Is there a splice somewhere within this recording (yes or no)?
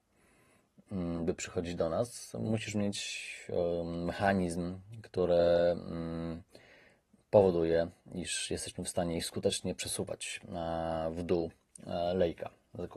no